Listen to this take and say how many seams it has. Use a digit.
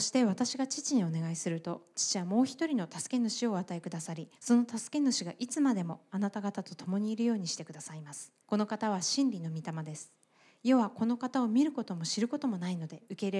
2